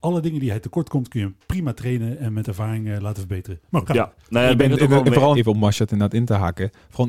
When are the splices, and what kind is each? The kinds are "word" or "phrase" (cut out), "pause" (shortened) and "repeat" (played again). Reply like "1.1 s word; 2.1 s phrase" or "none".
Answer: 3.8 s word; 5.3 s phrase